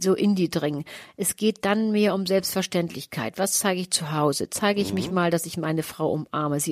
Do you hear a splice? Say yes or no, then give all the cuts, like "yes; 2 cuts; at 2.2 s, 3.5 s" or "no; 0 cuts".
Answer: no; 0 cuts